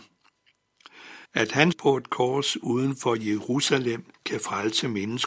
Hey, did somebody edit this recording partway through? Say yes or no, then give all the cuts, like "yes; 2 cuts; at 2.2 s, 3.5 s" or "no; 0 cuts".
yes; 3 cuts; at 1.3 s, 1.7 s, 4.1 s